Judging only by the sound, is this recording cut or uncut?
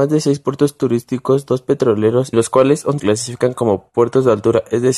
cut